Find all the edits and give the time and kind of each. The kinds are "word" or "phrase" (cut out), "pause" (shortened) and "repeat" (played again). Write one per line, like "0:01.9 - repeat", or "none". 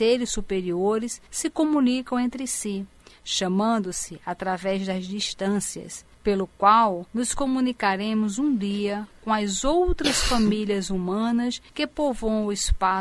0:01.3 - pause
0:06.1 - pause
0:07.1 - pause
0:11.7 - pause